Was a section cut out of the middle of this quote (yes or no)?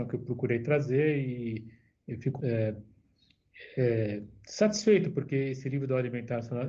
yes